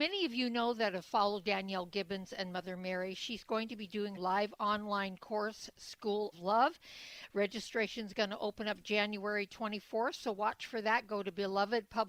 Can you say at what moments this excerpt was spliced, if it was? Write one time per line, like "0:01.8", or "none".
0:04.2
0:06.3